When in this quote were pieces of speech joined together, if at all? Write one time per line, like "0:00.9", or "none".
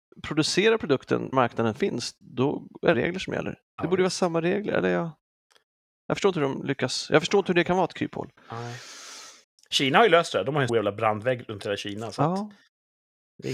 0:01.3
0:02.9
0:09.4
0:10.7